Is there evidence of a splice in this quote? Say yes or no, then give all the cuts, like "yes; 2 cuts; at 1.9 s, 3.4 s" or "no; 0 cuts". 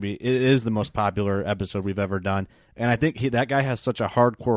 no; 0 cuts